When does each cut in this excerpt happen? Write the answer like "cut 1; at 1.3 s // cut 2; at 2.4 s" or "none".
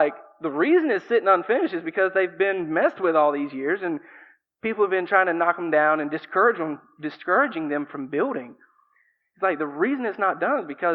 none